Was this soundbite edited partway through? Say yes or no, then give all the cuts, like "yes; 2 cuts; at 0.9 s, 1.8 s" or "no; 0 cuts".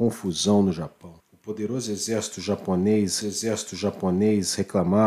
yes; 2 cuts; at 1.2 s, 3.2 s